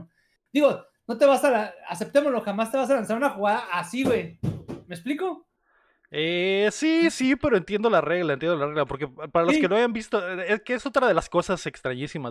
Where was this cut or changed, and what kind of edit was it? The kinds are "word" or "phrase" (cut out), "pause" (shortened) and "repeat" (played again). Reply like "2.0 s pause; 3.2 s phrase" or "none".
none